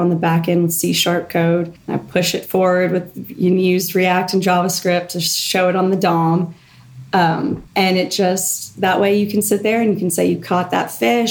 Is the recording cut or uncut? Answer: cut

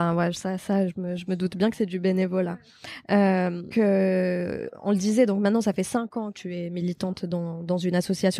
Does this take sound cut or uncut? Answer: cut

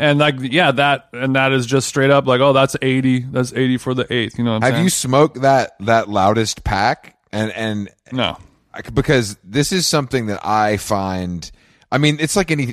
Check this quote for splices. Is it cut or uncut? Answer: uncut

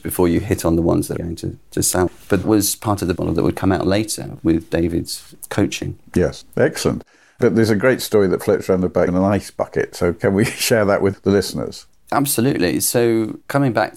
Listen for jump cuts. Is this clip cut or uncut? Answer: cut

